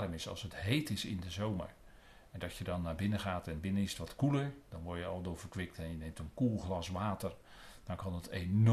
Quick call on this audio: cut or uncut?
uncut